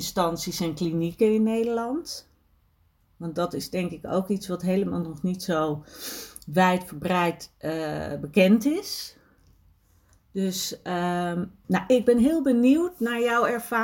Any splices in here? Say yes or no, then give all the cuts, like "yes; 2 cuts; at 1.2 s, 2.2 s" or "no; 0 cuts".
no; 0 cuts